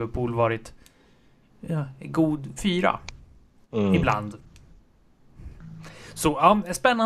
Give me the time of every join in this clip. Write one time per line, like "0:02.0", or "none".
0:02.6